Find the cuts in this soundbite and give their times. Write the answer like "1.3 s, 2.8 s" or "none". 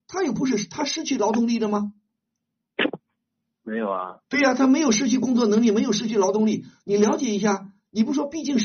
none